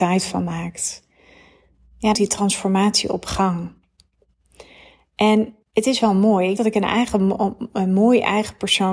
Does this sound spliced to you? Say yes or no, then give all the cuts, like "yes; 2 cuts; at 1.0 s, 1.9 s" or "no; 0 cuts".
yes; 3 cuts; at 2.1 s, 5.6 s, 6.6 s